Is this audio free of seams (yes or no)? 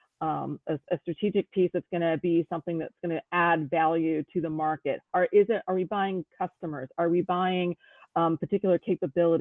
yes